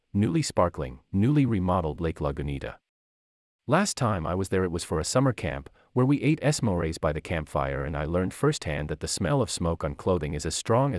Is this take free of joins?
yes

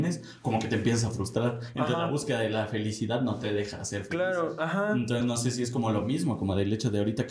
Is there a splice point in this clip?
no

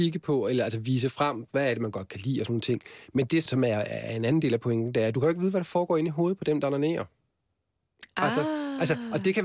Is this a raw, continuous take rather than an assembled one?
no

